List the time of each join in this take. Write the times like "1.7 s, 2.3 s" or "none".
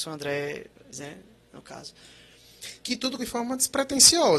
0.9 s, 3.2 s

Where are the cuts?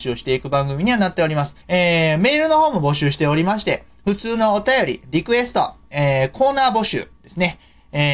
1.6 s, 7.2 s

